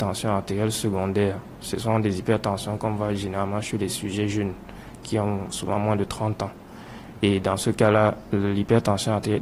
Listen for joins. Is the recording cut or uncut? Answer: uncut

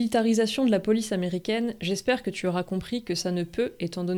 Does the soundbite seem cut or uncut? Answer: uncut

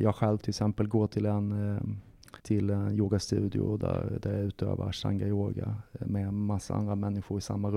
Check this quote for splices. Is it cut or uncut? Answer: cut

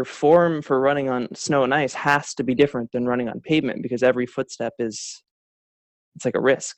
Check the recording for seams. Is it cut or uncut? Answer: uncut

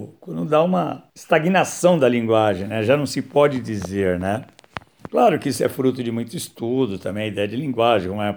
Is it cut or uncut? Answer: cut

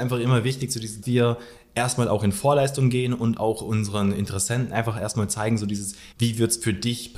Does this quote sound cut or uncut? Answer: cut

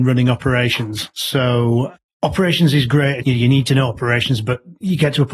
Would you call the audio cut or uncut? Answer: cut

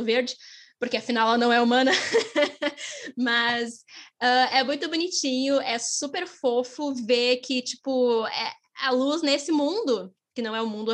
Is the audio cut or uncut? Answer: uncut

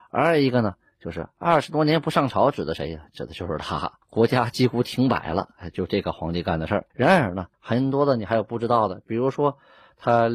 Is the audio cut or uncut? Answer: cut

